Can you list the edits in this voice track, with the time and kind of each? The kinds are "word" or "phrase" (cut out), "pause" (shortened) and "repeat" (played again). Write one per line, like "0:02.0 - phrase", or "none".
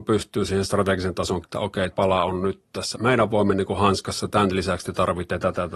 0:01.4 - word
0:01.9 - word
0:02.9 - word

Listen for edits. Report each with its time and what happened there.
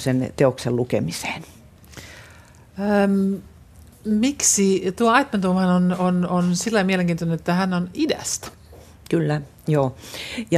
none

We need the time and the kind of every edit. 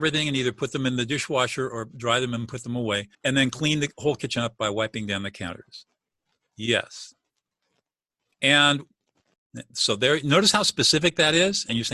0:03.1 - pause

